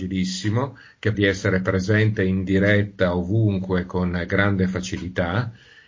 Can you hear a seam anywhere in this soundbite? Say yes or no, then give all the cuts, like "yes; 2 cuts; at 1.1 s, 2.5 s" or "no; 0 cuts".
yes; 1 cut; at 1.1 s